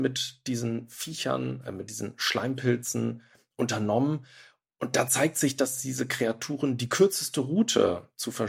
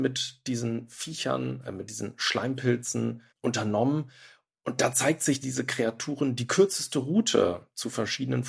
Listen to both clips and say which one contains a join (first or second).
second